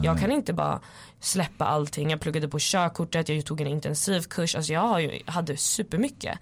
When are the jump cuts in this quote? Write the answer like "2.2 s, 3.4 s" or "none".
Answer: none